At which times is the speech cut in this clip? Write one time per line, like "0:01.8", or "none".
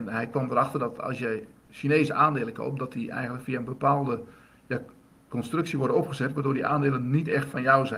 none